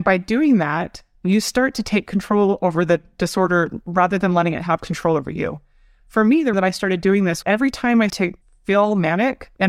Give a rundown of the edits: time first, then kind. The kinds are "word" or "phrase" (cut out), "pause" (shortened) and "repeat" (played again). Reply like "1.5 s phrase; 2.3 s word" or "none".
6.5 s word; 7.4 s word; 8.1 s word

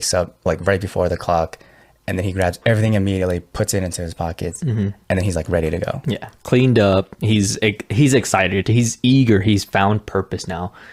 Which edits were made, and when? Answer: none

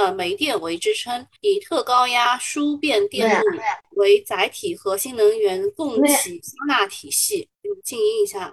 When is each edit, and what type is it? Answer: 1.4 s pause; 7.5 s pause

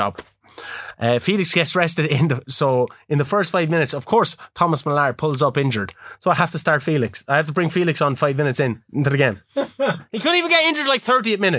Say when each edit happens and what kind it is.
none

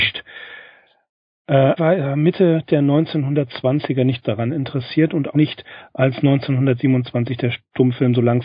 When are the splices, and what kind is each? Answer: 1.8 s word; 4.2 s word; 5.3 s word

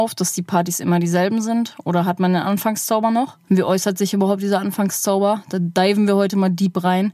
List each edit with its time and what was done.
3.4 s pause

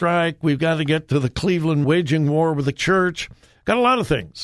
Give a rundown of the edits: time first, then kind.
1.8 s phrase; 2.7 s word

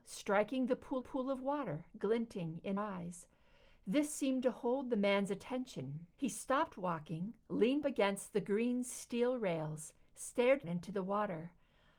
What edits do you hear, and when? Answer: 1.0 s repeat; 2.8 s word; 6.1 s pause; 7.8 s word; 10.6 s word

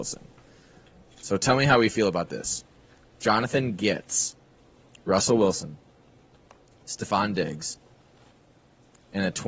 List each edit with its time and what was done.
none

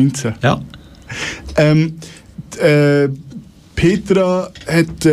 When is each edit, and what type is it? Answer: 3.6 s pause

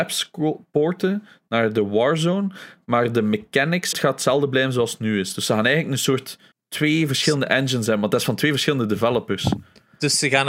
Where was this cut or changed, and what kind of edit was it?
3.9 s phrase; 6.5 s pause

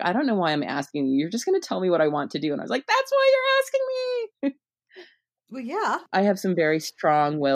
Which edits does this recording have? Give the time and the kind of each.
4.3 s pause

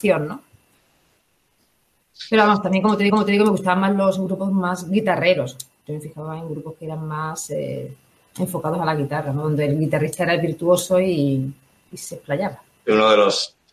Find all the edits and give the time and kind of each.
3.1 s repeat

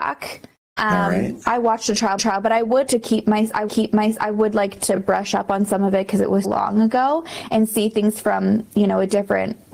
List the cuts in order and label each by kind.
2.2 s repeat; 2.9 s word; 3.7 s repeat; 6.4 s word

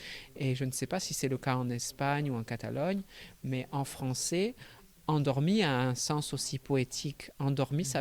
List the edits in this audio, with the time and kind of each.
none

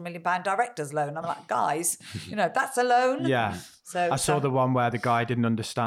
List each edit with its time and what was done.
none

